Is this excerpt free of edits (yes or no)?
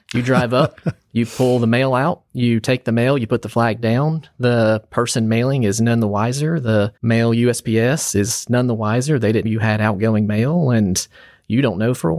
no